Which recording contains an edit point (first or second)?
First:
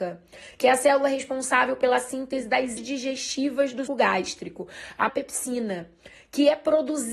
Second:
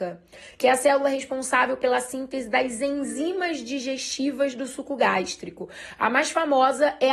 first